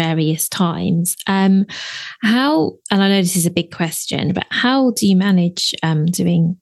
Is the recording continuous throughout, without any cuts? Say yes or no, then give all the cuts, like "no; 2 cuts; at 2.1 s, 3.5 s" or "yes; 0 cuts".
yes; 0 cuts